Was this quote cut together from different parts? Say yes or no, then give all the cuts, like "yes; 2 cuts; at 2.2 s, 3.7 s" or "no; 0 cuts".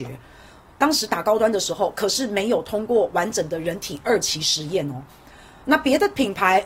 no; 0 cuts